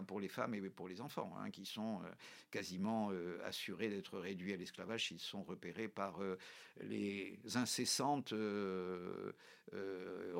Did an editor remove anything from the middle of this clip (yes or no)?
no